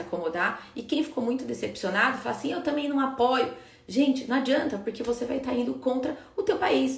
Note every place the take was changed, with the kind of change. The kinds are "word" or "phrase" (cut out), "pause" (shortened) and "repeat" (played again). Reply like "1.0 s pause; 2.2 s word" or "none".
none